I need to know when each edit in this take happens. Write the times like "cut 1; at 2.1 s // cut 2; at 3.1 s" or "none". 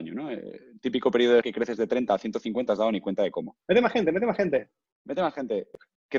cut 1; at 1.4 s // cut 2; at 2.7 s // cut 3; at 3.6 s // cut 4; at 4.9 s